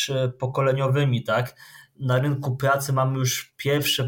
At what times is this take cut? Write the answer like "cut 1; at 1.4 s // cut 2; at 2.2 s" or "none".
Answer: none